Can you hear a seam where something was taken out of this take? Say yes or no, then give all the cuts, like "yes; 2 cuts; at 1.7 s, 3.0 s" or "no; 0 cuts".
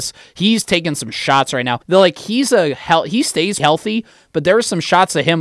yes; 2 cuts; at 1.8 s, 3.6 s